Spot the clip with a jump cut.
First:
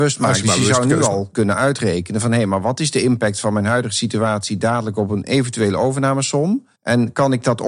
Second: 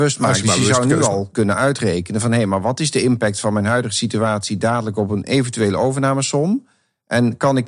first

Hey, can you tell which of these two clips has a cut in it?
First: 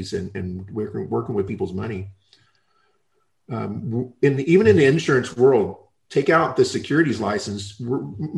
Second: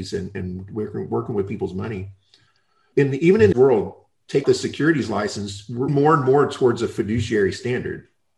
second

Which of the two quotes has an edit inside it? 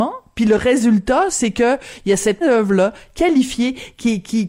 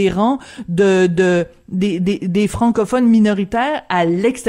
first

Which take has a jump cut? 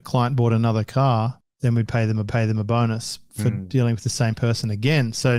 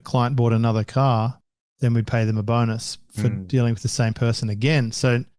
first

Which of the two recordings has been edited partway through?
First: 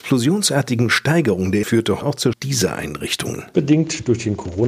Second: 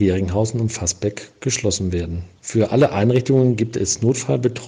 first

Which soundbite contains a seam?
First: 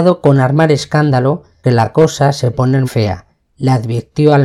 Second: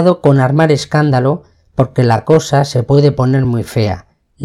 first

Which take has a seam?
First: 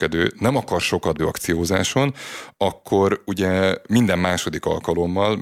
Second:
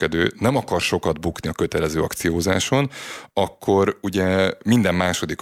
first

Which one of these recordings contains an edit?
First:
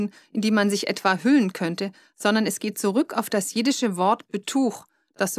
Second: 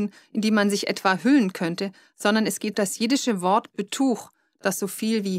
second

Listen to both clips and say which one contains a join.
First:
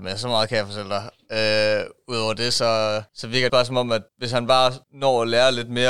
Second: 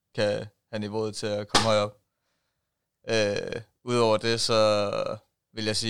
first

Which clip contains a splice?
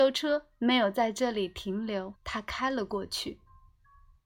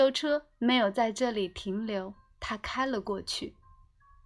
first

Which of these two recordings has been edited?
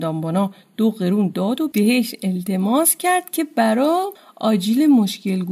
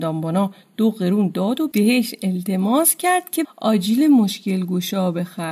second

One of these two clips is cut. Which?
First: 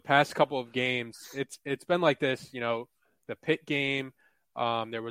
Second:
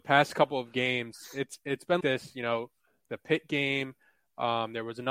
second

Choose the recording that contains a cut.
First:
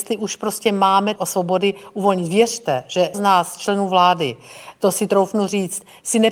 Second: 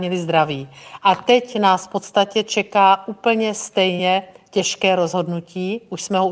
first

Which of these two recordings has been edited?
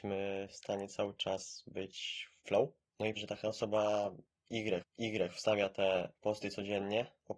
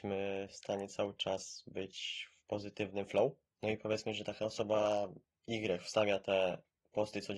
first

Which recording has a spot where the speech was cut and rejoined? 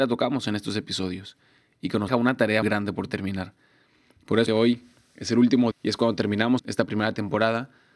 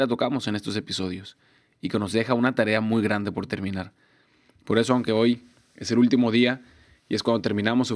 first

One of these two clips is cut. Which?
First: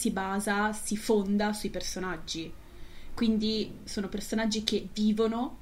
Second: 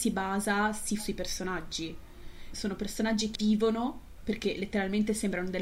second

